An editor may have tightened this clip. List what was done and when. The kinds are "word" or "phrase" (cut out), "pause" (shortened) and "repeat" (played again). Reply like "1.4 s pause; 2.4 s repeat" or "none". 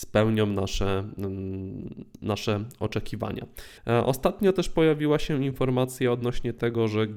3.8 s pause